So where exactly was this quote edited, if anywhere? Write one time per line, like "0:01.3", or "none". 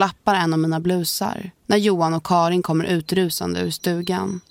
0:01.6